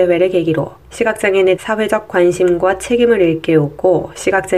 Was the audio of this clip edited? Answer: yes; 1 cut; at 1.6 s

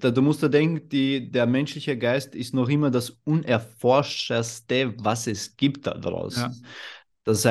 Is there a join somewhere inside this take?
no; 0 cuts

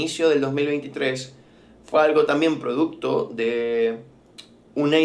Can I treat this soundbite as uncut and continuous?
yes; 0 cuts

